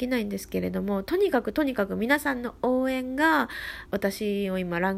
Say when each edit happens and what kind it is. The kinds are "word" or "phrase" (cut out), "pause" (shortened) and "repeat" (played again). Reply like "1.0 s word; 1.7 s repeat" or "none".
3.9 s phrase